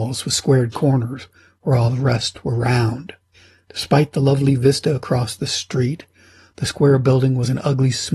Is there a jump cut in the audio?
no; 0 cuts

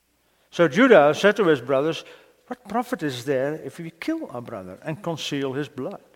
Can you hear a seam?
no; 0 cuts

